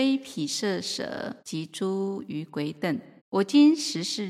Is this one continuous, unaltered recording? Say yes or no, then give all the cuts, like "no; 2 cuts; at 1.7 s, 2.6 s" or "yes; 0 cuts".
no; 2 cuts; at 1.4 s, 3.2 s